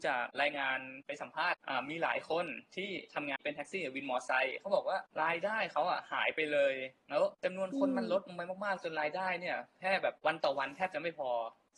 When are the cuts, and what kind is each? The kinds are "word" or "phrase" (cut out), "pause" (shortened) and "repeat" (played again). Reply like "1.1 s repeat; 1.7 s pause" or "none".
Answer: none